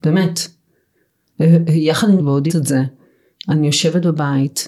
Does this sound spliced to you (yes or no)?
yes